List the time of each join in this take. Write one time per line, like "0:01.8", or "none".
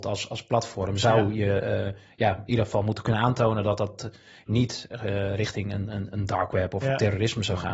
none